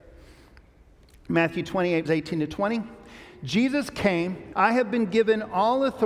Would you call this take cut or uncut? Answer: cut